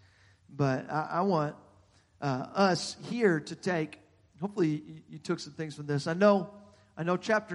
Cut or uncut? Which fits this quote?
uncut